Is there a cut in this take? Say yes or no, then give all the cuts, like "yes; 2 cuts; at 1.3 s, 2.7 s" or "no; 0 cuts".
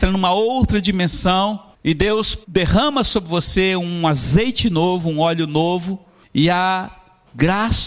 yes; 3 cuts; at 1.7 s, 2.4 s, 6.2 s